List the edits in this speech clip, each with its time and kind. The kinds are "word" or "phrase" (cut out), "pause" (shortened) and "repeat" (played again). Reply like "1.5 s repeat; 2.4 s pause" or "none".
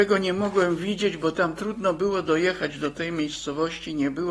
none